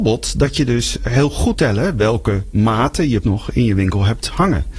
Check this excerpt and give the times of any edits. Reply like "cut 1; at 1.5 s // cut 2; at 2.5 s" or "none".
cut 1; at 1.5 s // cut 2; at 3.2 s